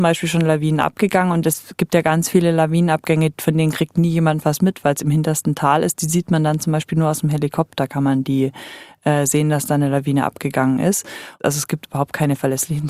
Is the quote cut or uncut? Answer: uncut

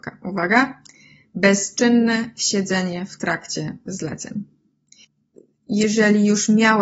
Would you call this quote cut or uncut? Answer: uncut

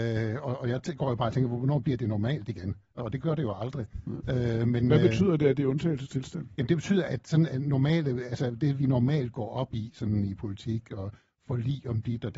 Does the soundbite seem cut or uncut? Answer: uncut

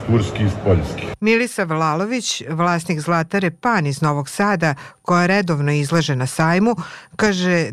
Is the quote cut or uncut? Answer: uncut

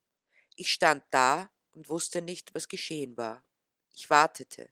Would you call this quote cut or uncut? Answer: uncut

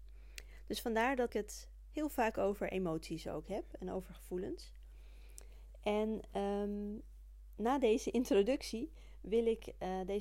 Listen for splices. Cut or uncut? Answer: cut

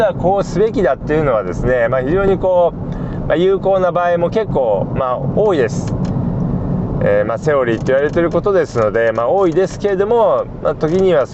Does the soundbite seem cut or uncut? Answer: uncut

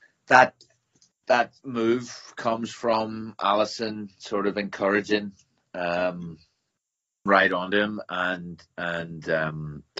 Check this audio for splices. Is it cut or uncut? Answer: cut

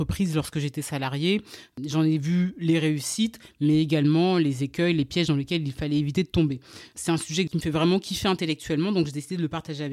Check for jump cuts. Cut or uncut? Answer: uncut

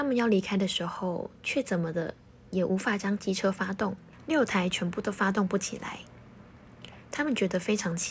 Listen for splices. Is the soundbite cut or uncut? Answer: uncut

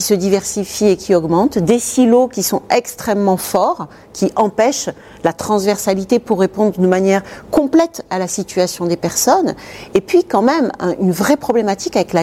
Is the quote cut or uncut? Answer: uncut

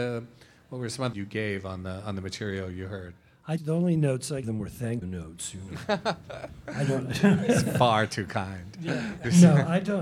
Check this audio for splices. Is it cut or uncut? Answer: cut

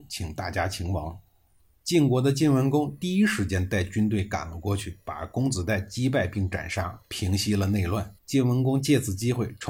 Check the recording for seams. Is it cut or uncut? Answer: cut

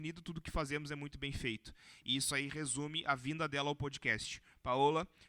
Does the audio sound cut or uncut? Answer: uncut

